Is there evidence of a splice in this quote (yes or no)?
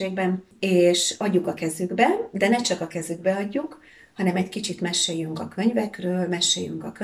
no